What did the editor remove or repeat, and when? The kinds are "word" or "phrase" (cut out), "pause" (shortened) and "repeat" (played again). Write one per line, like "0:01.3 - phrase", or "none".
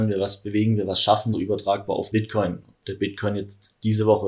0:01.3 - phrase
0:02.1 - word